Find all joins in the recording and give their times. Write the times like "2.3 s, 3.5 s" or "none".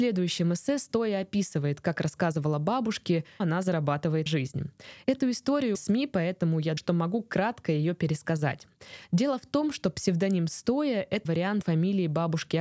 3.4 s, 4.3 s, 5.7 s, 6.8 s, 11.2 s, 11.6 s